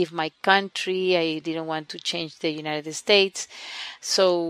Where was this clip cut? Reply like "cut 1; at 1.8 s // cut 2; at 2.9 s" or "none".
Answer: none